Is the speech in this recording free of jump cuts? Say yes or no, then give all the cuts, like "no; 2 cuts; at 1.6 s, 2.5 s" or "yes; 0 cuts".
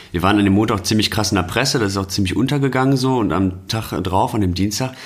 no; 1 cut; at 3.7 s